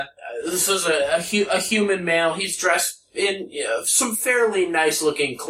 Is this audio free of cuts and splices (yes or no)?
yes